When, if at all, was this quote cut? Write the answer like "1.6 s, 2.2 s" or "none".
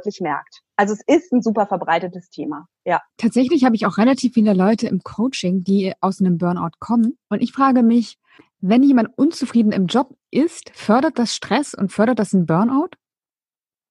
3.1 s, 7.2 s